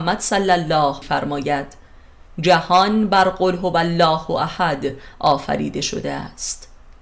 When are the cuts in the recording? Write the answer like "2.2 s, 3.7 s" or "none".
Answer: 1.0 s